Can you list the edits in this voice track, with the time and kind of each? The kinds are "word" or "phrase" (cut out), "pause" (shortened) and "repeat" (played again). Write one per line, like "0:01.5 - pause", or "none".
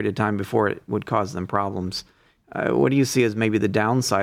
none

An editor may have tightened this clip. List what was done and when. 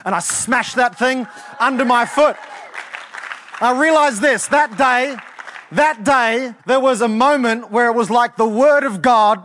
0:06.6 - pause

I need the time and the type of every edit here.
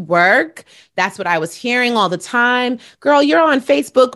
none

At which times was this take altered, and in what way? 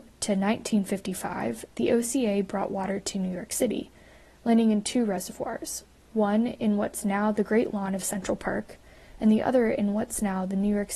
none

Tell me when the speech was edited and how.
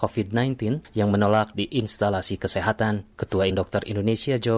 0:01.5 - word
0:03.5 - word

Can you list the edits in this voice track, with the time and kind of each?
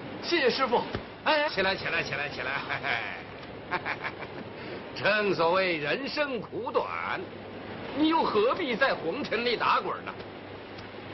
0:01.5 - word

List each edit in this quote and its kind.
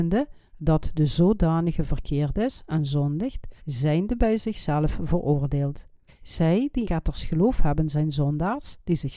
0:03.6 - pause
0:06.1 - pause
0:06.8 - word

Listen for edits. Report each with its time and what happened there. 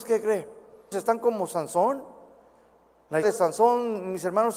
0:00.9 - word
0:03.2 - word

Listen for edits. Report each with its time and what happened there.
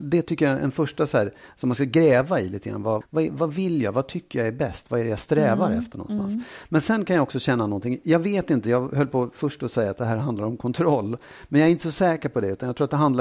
0:03.0 - word

